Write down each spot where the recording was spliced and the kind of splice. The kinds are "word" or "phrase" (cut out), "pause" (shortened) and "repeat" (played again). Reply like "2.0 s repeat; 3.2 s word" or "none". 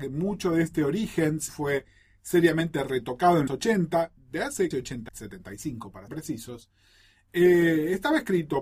1.5 s word; 3.5 s word; 4.2 s word; 4.7 s word; 5.1 s word; 6.1 s word